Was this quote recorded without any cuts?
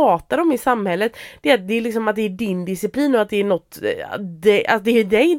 yes; 0 cuts

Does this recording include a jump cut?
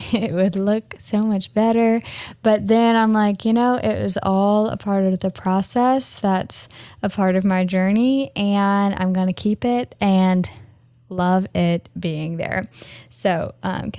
no; 0 cuts

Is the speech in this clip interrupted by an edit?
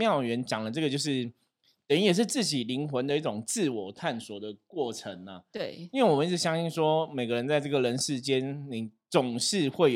no; 0 cuts

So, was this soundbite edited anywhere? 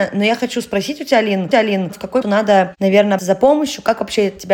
yes; 3 cuts; at 1.5 s, 2.2 s, 3.2 s

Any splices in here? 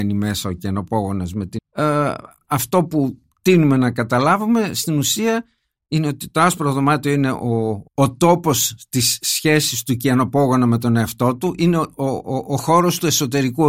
yes; 2 cuts; at 1.6 s, 7.9 s

